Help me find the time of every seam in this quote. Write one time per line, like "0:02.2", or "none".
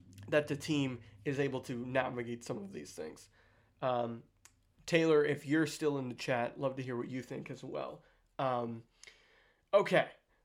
none